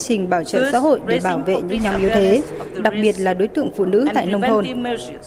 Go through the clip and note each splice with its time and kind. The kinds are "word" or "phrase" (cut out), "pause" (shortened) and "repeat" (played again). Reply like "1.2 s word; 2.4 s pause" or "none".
none